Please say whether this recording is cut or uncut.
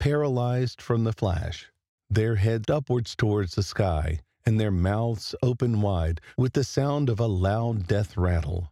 cut